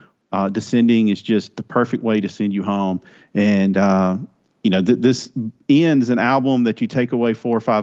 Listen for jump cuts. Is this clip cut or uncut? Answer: uncut